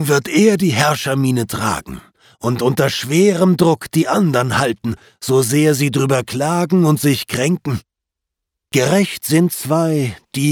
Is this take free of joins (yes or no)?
yes